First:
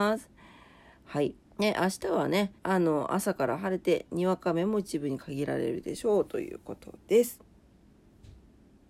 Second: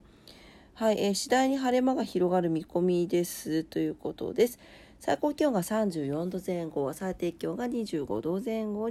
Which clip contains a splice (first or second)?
first